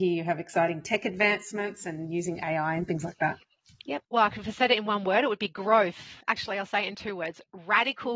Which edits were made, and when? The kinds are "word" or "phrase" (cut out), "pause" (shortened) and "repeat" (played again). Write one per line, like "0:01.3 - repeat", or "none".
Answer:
0:04.0 - pause
0:06.2 - pause